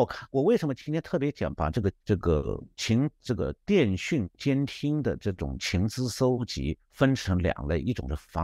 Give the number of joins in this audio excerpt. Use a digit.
3